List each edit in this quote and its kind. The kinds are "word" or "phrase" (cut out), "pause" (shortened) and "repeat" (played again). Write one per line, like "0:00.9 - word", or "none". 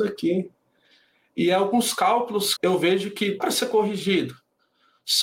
0:02.6 - word
0:03.4 - word

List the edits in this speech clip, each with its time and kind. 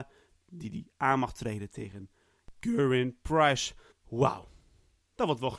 0:03.9 - pause

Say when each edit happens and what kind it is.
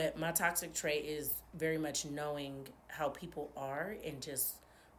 none

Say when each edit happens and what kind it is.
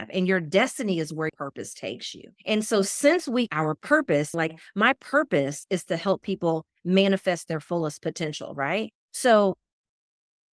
0:01.3 - word
0:02.4 - pause
0:03.5 - word
0:04.3 - word
0:09.0 - pause

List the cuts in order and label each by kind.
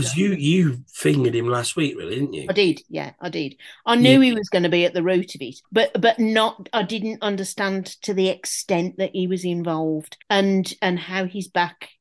0:05.6 - pause
0:10.2 - pause

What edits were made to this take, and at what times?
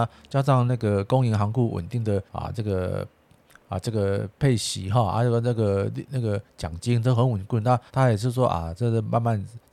0:02.3 - pause
0:07.9 - pause

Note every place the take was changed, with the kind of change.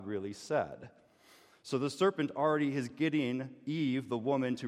none

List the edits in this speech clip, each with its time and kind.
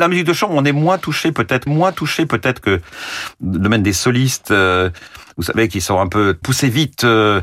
0:01.7 - repeat
0:06.4 - word

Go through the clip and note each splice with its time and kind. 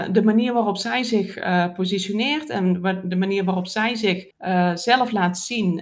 0:04.3 - pause

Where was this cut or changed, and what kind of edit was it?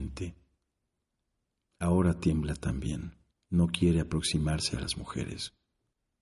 0:03.3 - pause

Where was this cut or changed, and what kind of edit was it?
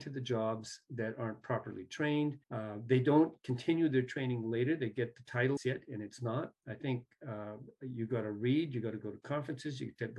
0:02.4 - pause
0:05.6 - phrase

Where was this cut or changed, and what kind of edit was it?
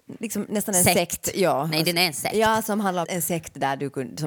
0:03.0 - word

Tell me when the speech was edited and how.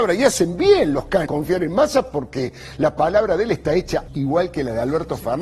0:01.3 - word
0:04.1 - word

